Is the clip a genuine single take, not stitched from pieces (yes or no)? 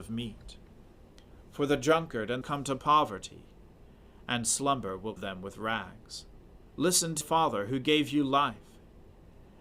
no